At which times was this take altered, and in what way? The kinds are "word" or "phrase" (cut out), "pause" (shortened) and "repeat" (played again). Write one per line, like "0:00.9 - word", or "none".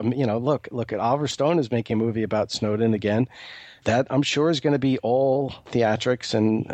none